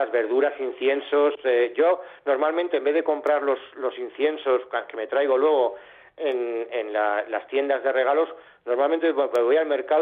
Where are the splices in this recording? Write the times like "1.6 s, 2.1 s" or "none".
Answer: none